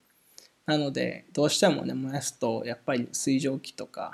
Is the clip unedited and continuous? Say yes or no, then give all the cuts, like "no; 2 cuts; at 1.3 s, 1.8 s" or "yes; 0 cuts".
yes; 0 cuts